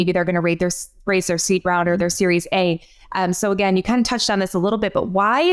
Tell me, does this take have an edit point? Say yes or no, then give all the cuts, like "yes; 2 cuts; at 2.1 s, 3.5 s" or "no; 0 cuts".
no; 0 cuts